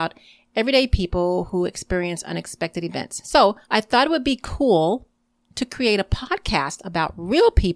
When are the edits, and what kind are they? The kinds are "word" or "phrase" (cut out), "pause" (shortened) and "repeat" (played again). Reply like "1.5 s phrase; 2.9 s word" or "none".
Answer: 3.6 s pause